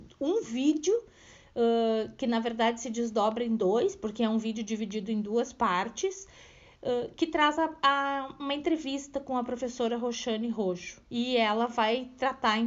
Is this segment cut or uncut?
cut